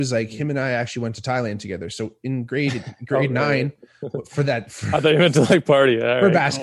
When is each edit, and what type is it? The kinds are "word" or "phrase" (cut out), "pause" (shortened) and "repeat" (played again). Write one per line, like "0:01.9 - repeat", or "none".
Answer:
none

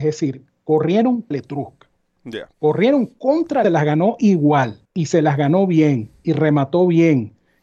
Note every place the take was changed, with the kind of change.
0:01.3 - word
0:02.5 - pause
0:03.6 - phrase
0:04.8 - pause

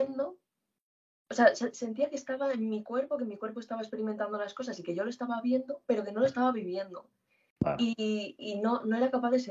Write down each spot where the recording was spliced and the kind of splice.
none

